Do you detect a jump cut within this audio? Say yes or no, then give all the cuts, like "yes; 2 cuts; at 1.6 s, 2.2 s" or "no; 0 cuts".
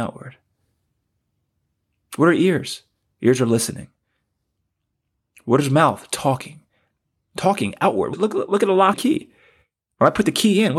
yes; 2 cuts; at 8.1 s, 8.9 s